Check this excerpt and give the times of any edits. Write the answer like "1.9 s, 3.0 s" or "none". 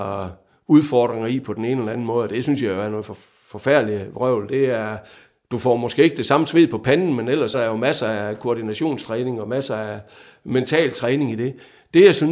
7.5 s